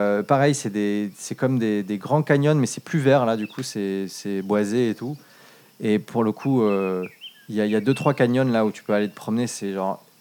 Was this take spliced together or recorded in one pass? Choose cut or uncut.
uncut